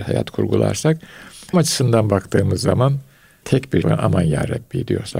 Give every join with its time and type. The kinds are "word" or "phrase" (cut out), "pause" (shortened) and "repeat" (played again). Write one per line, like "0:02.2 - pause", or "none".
0:01.5 - word
0:03.4 - word
0:03.8 - word

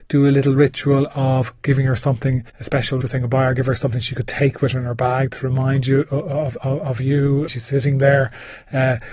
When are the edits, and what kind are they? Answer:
0:02.5 - pause
0:03.0 - word
0:06.6 - word
0:07.5 - word

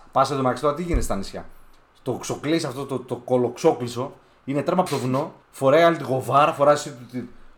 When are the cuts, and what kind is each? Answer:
0:04.9 - word
0:05.4 - pause

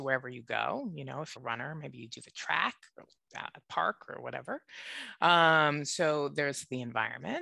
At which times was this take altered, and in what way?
0:01.4 - word

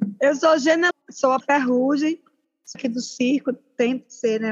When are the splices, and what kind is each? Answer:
0:00.9 - word
0:01.4 - word
0:02.7 - word

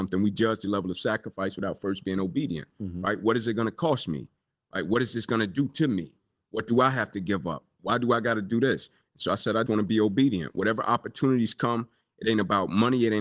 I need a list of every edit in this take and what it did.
0:09.7 - word

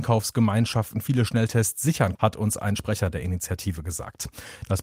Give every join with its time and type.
0:02.1 - word

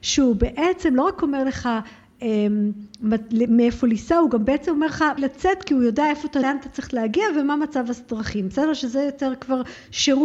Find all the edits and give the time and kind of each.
0:05.2 - word
0:06.4 - word

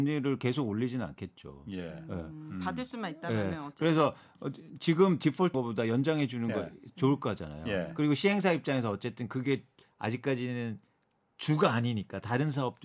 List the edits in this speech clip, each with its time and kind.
0:05.5 - word

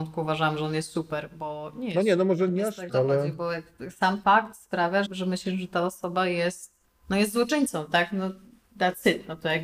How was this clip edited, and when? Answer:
0:02.5 - word
0:02.9 - word
0:04.2 - word
0:05.0 - word

